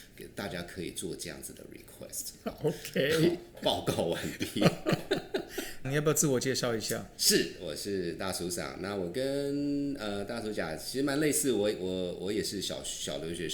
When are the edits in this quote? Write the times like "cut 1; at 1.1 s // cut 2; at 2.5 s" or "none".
cut 1; at 5.8 s